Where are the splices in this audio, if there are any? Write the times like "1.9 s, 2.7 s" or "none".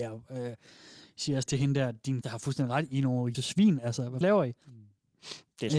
1.5 s, 2.2 s, 3.3 s, 4.2 s

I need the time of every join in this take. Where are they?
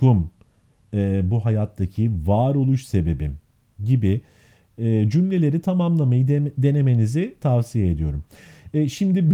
none

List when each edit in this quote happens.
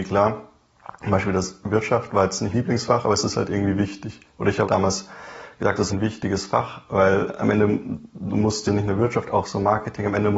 2.5 s, 4.6 s, 5.9 s, 8.7 s

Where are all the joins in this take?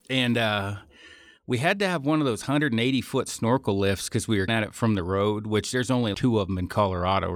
4.5 s, 6.1 s

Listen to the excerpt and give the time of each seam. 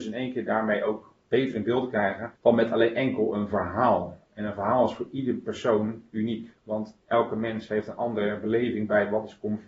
2.4 s, 6.6 s

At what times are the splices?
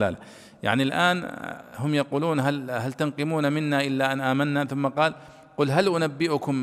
none

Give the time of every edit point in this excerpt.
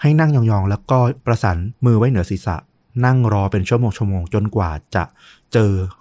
1.2 s

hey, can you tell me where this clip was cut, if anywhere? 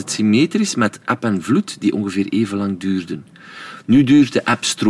none

